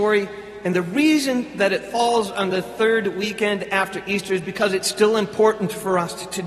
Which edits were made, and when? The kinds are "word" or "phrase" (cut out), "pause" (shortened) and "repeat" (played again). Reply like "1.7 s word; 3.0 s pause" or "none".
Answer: none